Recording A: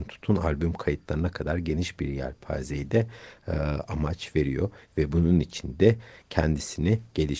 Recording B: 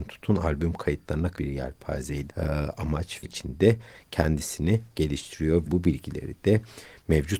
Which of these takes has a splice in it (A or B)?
B